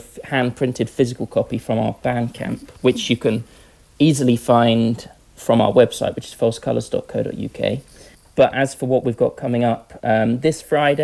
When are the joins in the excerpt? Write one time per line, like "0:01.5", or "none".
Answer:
none

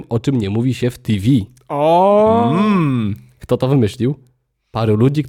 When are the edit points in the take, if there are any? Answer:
none

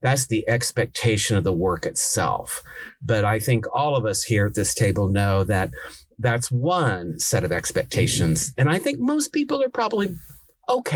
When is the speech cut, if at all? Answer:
none

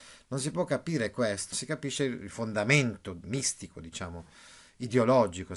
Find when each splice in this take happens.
0:01.5

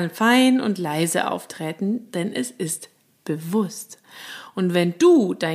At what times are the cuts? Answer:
none

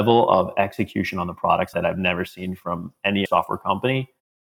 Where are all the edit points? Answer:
0:01.7
0:03.3

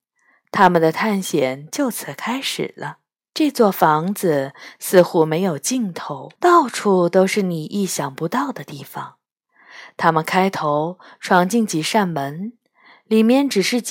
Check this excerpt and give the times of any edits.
0:03.2
0:06.4

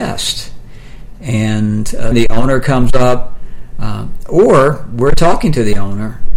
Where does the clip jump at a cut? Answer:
0:02.1

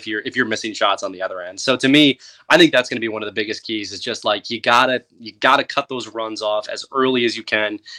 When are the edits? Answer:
none

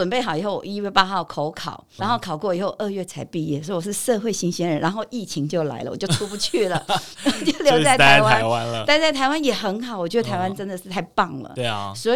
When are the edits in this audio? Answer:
0:02.0

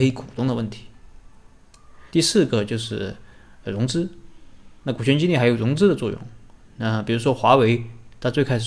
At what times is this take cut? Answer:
0:02.1

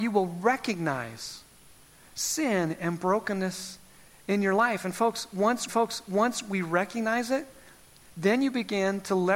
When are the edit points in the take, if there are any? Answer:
0:05.7

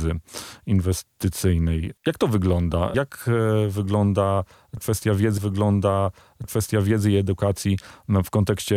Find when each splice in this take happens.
0:02.0
0:05.4

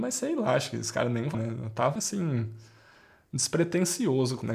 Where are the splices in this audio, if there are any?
0:01.3
0:02.0

